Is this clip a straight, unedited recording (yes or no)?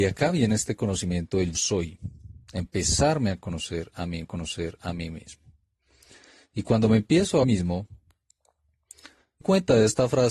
no